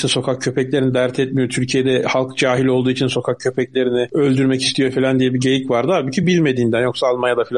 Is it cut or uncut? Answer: uncut